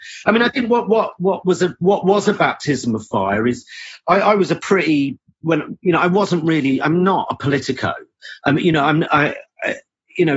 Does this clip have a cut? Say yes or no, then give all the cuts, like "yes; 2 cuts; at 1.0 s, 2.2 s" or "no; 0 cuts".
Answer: no; 0 cuts